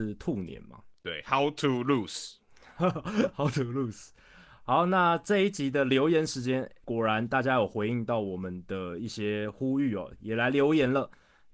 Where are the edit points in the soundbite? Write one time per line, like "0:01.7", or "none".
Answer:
0:00.9
0:06.8

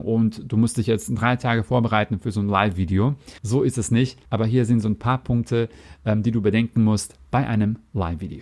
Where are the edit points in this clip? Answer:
0:03.4
0:04.2

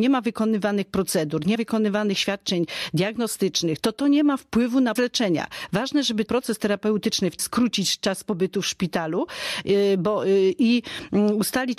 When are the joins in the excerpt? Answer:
0:01.5
0:03.8
0:05.0
0:06.3
0:07.4

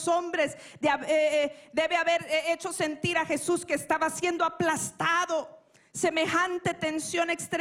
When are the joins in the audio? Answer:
none

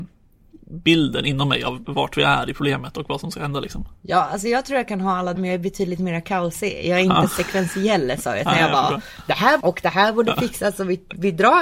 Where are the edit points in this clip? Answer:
0:01.8
0:04.0
0:05.3
0:09.6

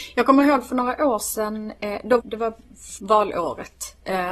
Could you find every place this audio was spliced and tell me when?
0:02.2
0:03.0

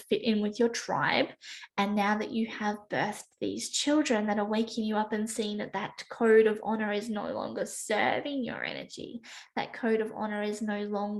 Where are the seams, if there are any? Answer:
none

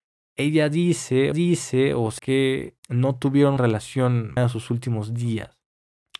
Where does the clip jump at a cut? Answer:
0:01.3
0:02.2
0:02.8
0:03.6
0:04.4

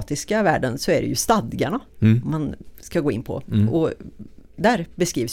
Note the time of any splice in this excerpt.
0:01.9

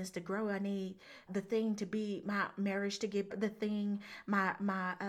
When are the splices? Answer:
0:01.3
0:03.3

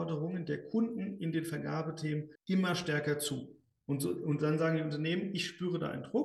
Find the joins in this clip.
0:02.4

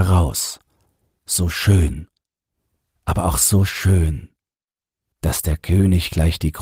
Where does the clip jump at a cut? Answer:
none

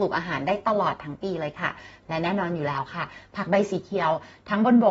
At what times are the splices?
none

